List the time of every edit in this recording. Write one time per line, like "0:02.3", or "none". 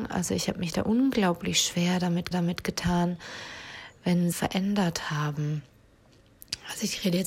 0:02.3
0:04.3

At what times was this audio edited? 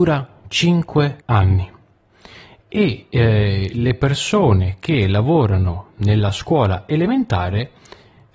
0:01.2

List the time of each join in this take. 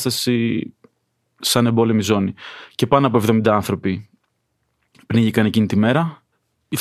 none

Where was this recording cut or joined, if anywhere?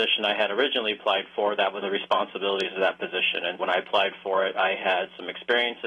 0:01.8
0:03.6

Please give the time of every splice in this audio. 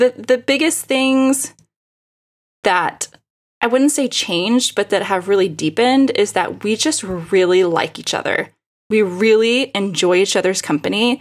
none

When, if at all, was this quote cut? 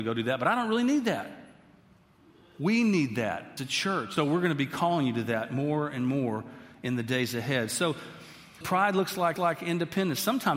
0:03.6
0:04.2
0:08.6
0:09.4

